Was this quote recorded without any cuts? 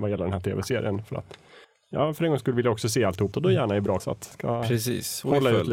no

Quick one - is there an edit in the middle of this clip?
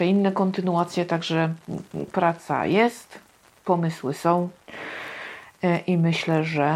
no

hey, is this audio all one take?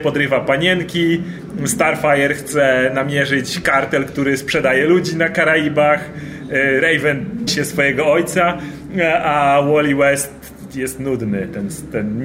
no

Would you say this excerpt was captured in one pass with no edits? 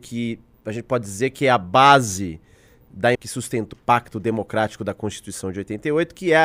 no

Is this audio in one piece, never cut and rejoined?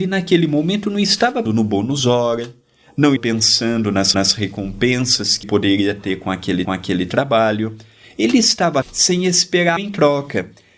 no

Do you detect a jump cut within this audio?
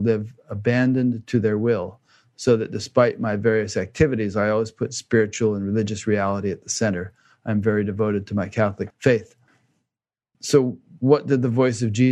no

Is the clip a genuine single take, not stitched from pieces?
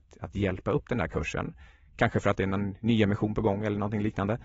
yes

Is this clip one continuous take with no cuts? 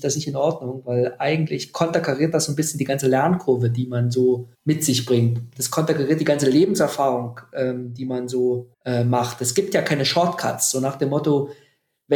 no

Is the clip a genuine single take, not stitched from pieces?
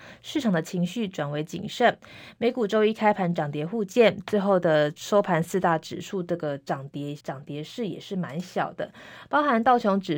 no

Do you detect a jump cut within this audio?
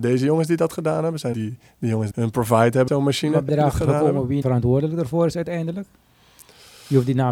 yes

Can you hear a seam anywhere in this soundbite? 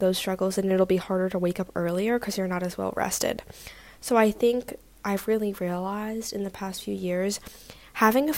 no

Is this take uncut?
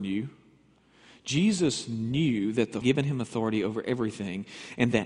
no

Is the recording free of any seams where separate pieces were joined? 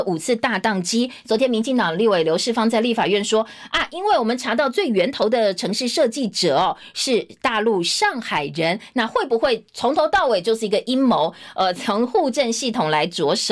yes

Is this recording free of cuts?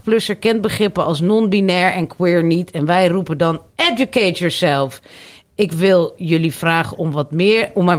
yes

